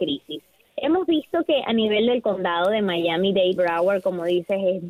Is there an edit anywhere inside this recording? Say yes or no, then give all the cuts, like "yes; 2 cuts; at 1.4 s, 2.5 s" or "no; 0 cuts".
yes; 1 cut; at 3.6 s